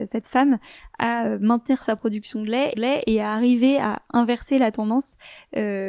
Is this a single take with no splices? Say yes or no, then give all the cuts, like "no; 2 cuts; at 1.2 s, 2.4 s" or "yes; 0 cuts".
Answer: no; 1 cut; at 2.7 s